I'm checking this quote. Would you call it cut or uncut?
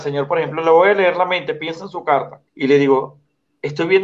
cut